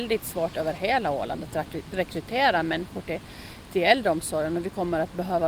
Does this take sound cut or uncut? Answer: uncut